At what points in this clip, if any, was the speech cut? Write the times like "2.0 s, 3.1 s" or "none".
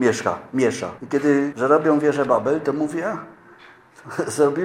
1.0 s, 1.5 s